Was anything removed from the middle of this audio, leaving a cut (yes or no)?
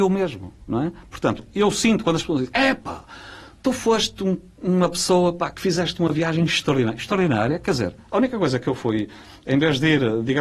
no